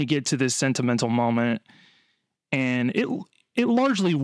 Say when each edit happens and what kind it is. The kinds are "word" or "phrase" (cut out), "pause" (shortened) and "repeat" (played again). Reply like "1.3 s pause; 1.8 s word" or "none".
none